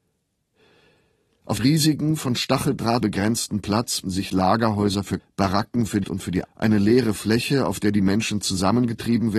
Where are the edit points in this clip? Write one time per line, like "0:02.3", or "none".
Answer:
0:01.6
0:03.0
0:04.0
0:05.2
0:06.0
0:06.4